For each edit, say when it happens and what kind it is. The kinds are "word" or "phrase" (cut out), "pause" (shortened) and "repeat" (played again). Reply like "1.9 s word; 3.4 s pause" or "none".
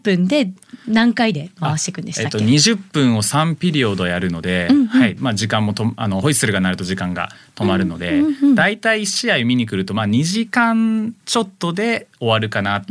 5.2 s word; 11.2 s pause